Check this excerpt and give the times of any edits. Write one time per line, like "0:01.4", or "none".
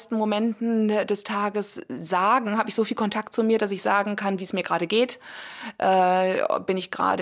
none